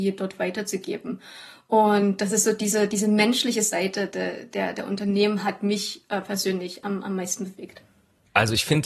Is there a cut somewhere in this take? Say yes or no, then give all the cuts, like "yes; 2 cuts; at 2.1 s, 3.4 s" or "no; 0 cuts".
no; 0 cuts